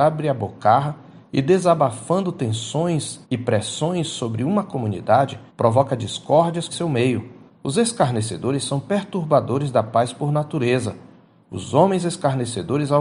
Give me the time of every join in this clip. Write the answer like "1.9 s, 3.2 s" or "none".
3.2 s, 5.5 s, 6.7 s, 7.5 s